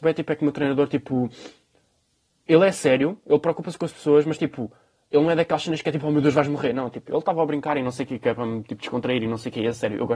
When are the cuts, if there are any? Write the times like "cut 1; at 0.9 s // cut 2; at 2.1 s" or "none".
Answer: none